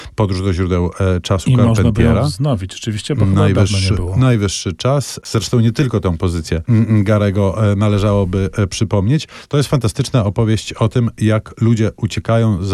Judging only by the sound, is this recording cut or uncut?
uncut